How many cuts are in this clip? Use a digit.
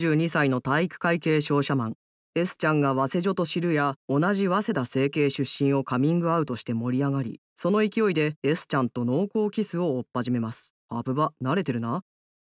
5